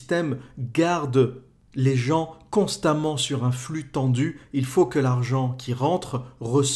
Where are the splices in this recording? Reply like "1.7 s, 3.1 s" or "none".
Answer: none